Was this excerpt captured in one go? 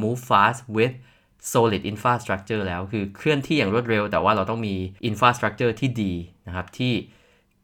no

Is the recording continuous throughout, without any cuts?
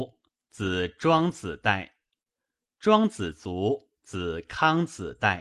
no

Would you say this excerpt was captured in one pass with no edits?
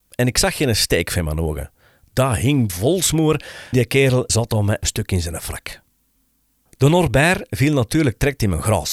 no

